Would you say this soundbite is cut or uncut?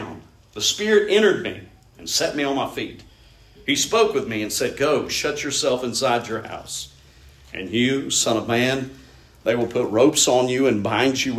uncut